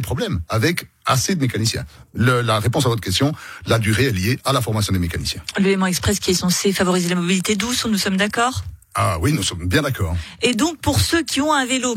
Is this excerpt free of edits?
yes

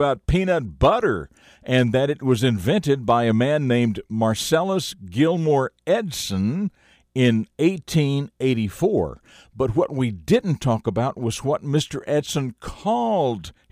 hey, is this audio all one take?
yes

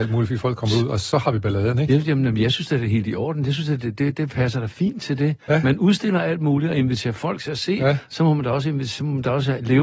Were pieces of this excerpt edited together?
no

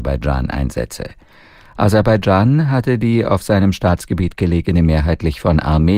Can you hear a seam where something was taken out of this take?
no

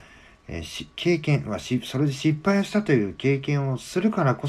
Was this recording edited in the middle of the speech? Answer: yes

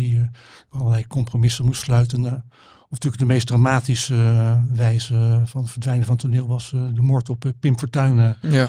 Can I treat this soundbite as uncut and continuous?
yes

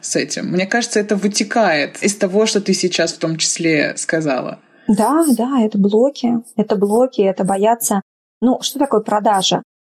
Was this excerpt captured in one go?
yes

